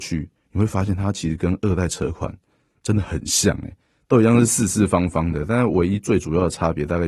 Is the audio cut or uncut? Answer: uncut